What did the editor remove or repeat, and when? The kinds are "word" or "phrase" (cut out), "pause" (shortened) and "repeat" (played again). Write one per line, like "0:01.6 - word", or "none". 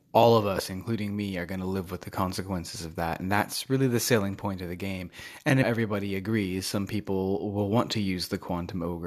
0:05.6 - phrase